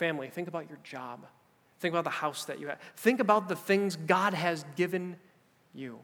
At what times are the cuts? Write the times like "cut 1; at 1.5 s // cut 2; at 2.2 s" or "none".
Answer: none